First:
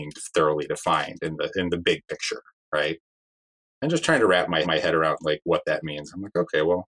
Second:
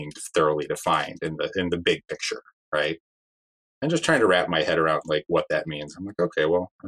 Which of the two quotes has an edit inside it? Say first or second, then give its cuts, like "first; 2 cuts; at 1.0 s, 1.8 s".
first; 1 cut; at 4.6 s